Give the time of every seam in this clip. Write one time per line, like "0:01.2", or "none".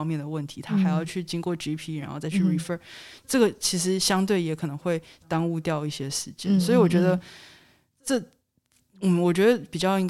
none